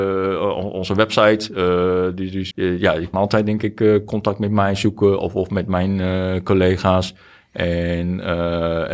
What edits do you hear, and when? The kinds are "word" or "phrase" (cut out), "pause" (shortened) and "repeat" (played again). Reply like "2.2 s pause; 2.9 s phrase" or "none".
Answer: 2.5 s word; 3.1 s word